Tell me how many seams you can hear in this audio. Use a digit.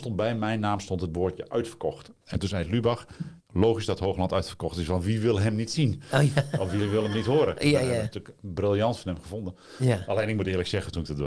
1